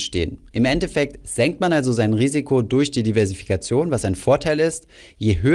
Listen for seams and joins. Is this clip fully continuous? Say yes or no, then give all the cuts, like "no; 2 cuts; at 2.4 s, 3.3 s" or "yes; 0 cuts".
yes; 0 cuts